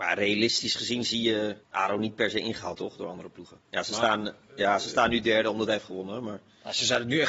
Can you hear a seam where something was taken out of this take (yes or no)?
yes